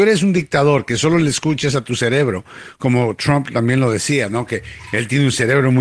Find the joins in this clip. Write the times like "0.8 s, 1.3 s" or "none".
none